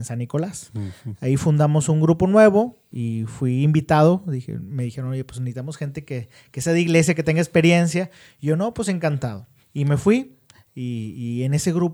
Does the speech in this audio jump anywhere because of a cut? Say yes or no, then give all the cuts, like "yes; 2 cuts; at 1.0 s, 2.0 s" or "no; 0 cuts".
yes; 2 cuts; at 2.9 s, 9.6 s